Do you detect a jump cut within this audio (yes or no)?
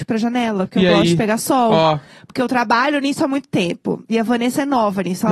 no